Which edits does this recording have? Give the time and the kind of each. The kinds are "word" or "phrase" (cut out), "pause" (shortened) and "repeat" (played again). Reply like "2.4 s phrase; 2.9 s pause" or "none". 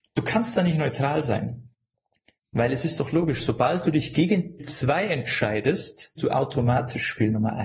4.6 s word; 6.2 s word